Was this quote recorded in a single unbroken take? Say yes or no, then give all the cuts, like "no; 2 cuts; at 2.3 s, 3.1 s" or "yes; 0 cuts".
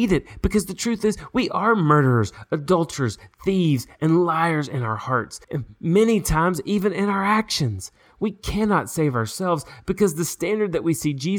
no; 1 cut; at 5.4 s